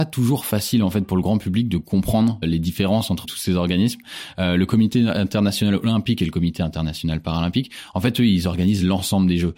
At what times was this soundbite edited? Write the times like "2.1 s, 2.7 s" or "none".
2.4 s, 3.2 s